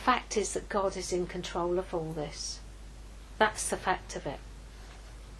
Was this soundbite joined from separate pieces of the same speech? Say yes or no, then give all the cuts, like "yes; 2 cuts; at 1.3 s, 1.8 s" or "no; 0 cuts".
no; 0 cuts